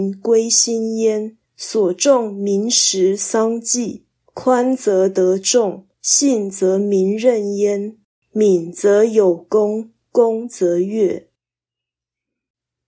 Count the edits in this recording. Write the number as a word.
five